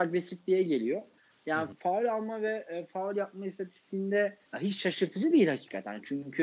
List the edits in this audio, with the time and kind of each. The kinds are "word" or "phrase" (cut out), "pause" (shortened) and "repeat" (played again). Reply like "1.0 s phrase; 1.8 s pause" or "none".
1.7 s word; 4.5 s pause